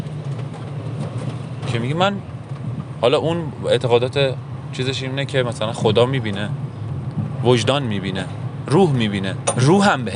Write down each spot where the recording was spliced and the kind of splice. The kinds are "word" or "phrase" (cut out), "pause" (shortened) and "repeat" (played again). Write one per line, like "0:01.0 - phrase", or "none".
none